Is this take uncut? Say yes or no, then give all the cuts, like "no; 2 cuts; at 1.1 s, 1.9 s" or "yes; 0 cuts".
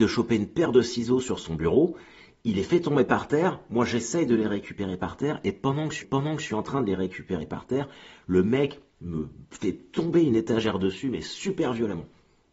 no; 1 cut; at 6.0 s